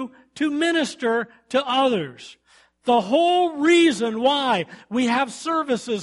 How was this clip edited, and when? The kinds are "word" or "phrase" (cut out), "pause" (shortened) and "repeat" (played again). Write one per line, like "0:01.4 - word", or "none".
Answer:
none